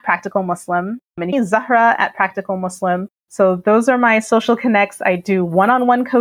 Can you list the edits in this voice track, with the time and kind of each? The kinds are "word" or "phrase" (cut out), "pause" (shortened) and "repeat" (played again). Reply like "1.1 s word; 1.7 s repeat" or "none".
1.3 s phrase